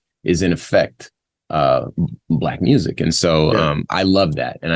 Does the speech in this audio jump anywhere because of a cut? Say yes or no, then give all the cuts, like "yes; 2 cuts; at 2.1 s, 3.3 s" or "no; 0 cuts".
no; 0 cuts